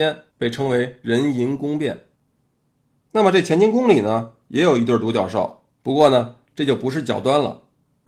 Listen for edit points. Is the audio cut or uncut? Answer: cut